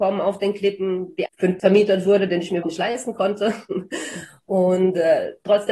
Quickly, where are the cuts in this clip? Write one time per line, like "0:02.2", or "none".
0:01.3
0:01.6
0:02.6